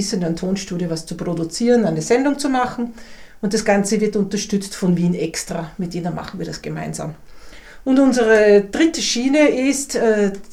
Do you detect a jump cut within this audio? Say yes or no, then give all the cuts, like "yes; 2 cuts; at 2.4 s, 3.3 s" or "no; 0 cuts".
no; 0 cuts